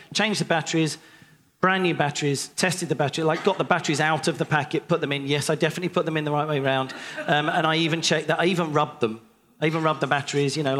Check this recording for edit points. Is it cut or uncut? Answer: uncut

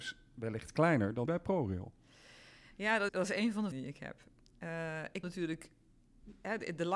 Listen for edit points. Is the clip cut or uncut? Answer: cut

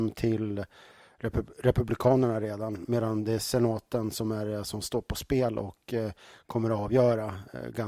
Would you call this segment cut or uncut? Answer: uncut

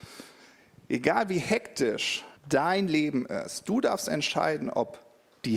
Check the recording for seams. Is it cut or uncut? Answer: cut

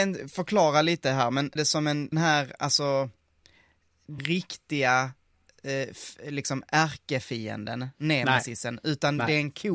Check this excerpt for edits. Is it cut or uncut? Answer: cut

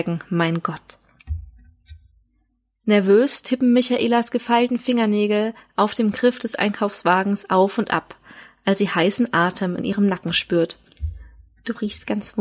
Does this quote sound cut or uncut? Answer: uncut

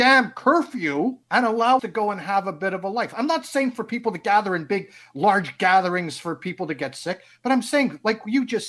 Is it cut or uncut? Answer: cut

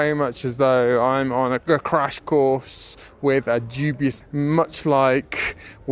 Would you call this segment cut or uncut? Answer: cut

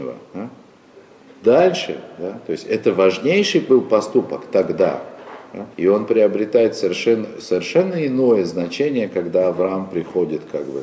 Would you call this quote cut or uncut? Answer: cut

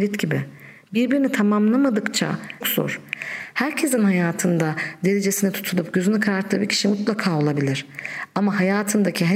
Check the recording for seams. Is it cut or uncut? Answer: cut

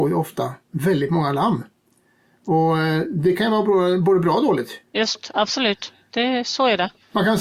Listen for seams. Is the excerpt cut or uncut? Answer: uncut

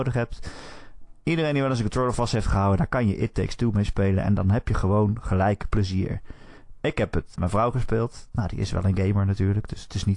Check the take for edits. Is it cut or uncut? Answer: cut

